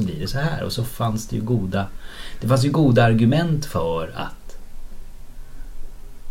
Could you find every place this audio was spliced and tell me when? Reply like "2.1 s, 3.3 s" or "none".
none